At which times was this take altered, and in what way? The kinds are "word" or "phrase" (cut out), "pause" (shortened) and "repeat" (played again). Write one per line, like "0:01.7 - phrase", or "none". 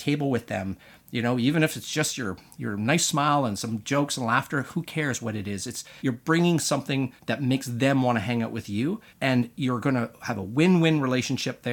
0:06.0 - pause
0:07.2 - pause
0:09.1 - pause